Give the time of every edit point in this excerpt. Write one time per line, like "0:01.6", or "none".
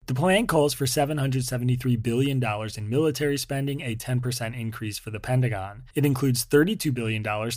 0:05.9